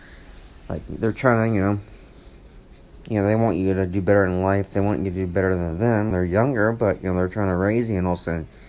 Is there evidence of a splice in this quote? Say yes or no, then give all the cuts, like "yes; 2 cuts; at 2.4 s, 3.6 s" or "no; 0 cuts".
yes; 1 cut; at 6.1 s